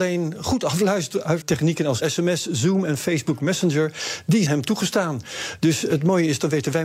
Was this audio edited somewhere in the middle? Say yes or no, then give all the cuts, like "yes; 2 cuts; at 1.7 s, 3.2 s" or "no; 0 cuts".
yes; 3 cuts; at 1.4 s, 2.0 s, 4.5 s